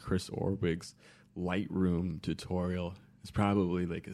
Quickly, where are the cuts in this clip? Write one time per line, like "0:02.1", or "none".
none